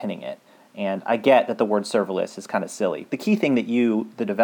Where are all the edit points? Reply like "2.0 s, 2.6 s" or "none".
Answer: 3.1 s